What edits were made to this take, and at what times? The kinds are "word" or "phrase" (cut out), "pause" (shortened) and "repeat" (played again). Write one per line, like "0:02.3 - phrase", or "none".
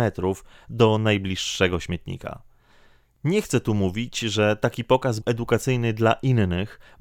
0:05.2 - word